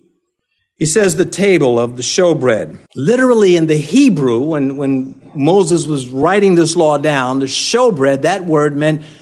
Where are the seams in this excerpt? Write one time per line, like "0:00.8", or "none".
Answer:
0:02.9